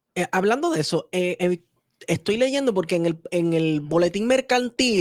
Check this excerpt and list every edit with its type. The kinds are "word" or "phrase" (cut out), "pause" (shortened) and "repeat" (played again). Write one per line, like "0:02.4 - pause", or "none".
none